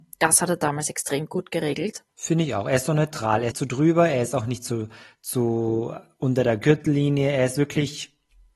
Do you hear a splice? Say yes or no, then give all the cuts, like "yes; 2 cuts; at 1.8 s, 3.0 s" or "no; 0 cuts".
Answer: yes; 2 cuts; at 2.1 s, 3.5 s